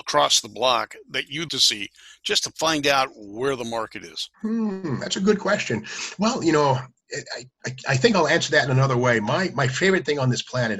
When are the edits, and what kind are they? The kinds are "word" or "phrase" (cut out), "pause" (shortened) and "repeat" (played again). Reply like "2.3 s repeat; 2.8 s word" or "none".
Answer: 1.5 s word; 4.3 s pause